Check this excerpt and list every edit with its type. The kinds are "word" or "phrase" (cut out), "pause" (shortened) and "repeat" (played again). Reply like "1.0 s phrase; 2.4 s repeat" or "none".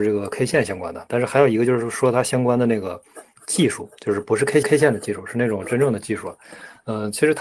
4.6 s repeat

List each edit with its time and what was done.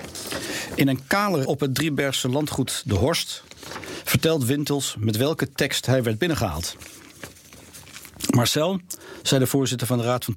1.4 s word

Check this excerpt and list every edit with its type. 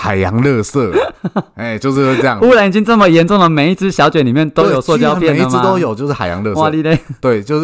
none

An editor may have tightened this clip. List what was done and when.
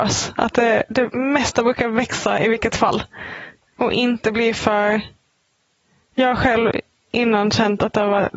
none

